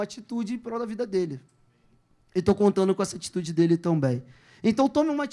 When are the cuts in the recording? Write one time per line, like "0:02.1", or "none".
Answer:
none